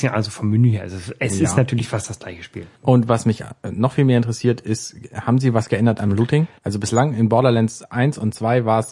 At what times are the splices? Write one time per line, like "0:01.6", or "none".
0:02.7
0:06.6

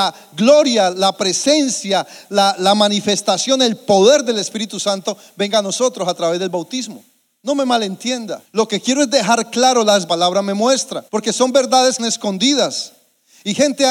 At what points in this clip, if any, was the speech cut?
0:08.4
0:10.1
0:11.1
0:12.0

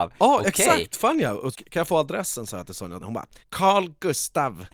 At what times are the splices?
0:01.5
0:03.0
0:03.4

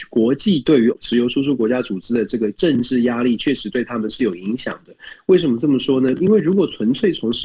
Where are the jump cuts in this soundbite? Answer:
0:00.9

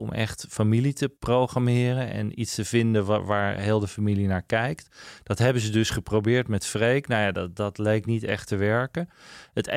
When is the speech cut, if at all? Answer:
0:01.2

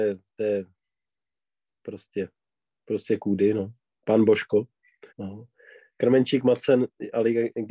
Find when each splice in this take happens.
0:05.1

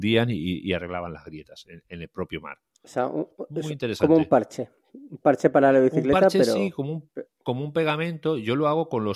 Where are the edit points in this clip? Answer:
none

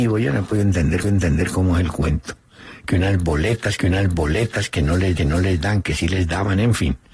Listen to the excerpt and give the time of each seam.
0:01.0
0:03.8
0:05.2

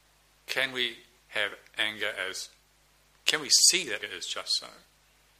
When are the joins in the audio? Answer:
0:04.0

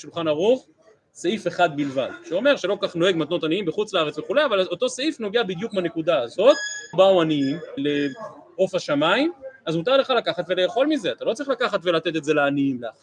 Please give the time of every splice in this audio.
0:06.9
0:07.8

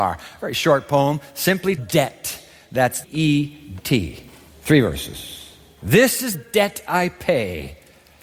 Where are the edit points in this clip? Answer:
0:01.8
0:03.0
0:03.8
0:04.5
0:06.3

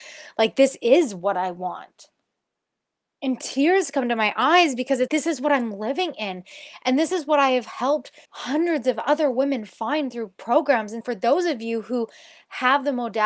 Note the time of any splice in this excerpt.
0:05.1
0:08.3
0:11.0

